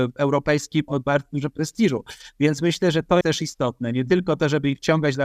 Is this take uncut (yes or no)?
no